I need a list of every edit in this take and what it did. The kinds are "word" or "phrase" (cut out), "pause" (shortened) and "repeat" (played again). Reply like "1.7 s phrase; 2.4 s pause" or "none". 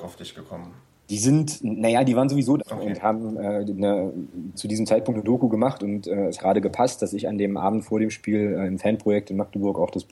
2.6 s word; 4.5 s word; 6.4 s word